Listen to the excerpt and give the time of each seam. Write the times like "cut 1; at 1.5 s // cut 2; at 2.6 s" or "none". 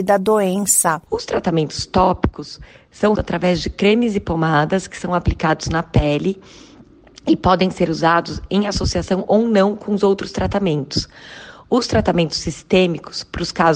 cut 1; at 3.2 s